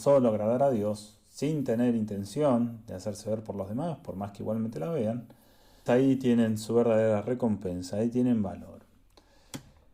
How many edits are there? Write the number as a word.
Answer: one